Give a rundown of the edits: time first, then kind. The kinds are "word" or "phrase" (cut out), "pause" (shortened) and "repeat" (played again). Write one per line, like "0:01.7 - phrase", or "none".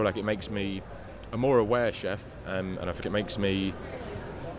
0:03.0 - word